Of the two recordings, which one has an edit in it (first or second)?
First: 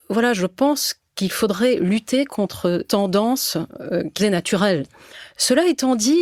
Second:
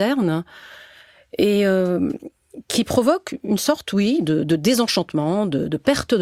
first